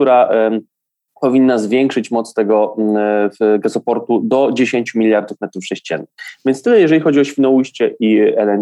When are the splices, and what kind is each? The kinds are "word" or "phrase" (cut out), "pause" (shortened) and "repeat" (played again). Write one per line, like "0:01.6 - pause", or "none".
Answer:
none

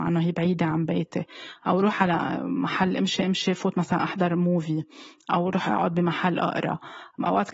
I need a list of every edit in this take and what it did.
none

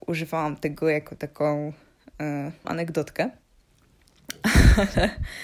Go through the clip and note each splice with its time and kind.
0:02.6 - word

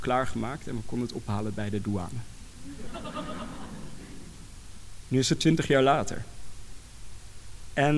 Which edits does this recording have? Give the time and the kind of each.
none

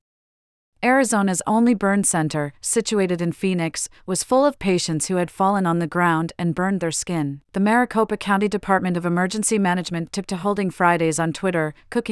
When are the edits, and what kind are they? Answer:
0:07.4 - pause

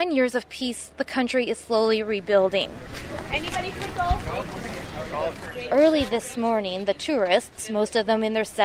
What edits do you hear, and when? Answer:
none

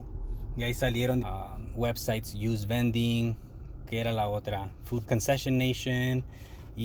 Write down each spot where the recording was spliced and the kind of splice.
0:01.2 - word
0:05.0 - word

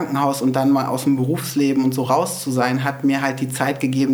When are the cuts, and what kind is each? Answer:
none

